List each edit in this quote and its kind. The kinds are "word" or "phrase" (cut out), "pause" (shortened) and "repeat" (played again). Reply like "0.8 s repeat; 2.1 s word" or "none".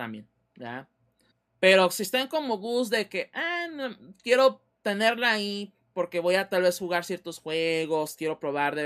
1.3 s pause